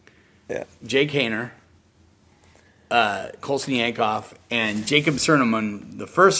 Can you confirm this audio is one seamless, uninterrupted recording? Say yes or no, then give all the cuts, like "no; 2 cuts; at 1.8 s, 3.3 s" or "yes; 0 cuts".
yes; 0 cuts